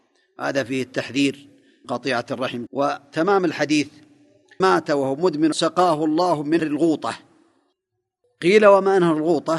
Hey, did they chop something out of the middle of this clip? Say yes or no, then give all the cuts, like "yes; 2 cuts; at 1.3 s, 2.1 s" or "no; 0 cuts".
yes; 5 cuts; at 1.8 s, 2.7 s, 4.6 s, 5.5 s, 6.6 s